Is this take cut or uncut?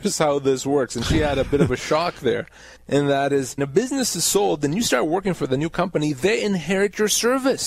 cut